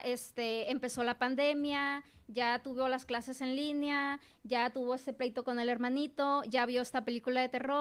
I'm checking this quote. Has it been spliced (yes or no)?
no